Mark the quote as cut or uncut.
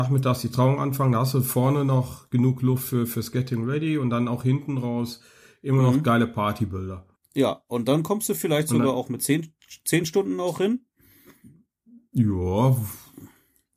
cut